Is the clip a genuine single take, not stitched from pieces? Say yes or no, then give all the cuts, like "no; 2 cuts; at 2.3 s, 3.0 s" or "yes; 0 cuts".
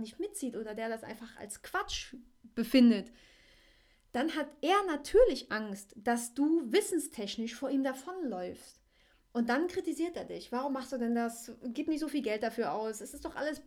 yes; 0 cuts